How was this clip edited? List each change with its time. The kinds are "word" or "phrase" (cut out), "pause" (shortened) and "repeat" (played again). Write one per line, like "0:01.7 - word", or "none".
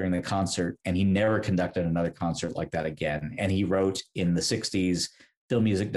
none

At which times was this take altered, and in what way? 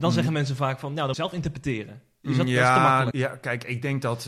0:01.1 - word
0:03.1 - word

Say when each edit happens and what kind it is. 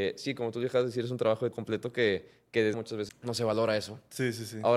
0:01.5 - word
0:02.7 - word
0:03.1 - word

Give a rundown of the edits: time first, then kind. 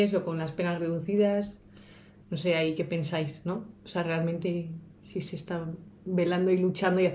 0:03.8 - pause

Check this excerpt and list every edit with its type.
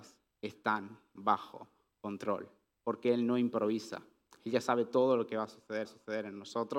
0:05.8 - repeat

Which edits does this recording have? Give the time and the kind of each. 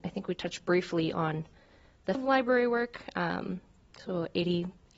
0:02.1 - word

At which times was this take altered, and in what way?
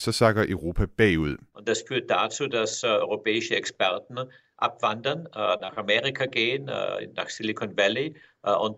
none

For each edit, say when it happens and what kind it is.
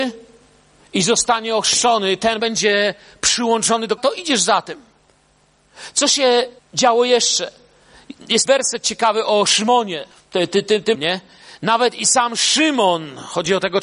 0:02.4 - phrase
0:04.0 - word
0:06.6 - pause
0:08.5 - word
0:10.1 - pause
0:10.9 - word

